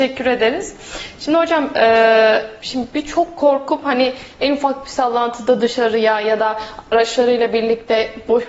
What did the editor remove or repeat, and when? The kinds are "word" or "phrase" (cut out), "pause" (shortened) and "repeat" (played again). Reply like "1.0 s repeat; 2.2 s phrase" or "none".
2.6 s pause